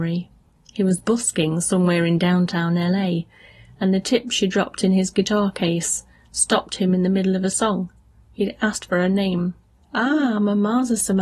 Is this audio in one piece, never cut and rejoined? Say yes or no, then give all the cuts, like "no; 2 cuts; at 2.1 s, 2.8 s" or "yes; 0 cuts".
yes; 0 cuts